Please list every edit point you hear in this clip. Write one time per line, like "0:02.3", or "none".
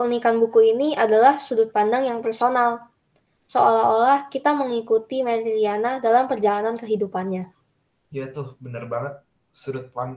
none

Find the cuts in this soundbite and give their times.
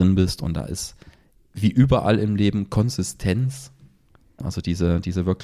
none

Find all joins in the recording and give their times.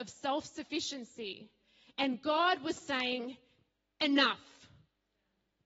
none

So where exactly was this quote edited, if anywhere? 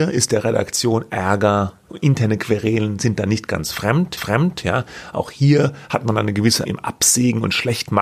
0:04.2
0:06.6

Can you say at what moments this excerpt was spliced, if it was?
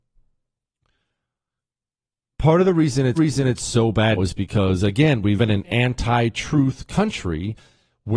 0:03.2
0:04.2
0:05.4

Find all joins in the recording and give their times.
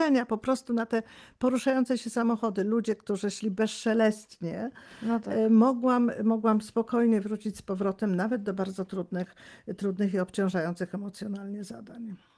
none

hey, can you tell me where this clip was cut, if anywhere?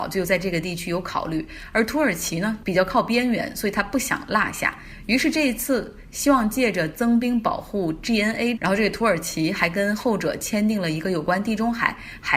0:08.6

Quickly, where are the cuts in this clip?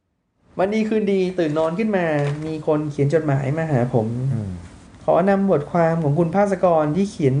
0:04.9

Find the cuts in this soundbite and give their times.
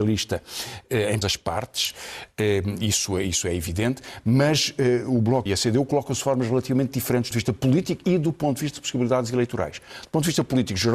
0:01.2
0:05.5
0:07.3

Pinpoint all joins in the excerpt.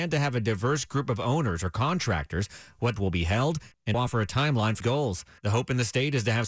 0:03.0
0:03.9
0:04.8

